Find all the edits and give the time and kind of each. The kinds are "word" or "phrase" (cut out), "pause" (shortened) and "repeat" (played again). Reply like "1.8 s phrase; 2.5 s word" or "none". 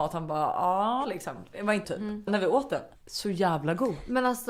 1.0 s word; 1.8 s word; 2.3 s word; 3.0 s pause